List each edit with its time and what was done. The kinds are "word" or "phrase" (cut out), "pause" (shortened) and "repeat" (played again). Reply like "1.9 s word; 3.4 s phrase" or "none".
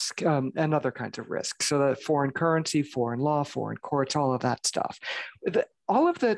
none